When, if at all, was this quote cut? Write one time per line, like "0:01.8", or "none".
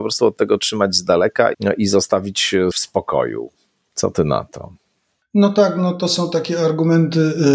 0:01.5
0:02.7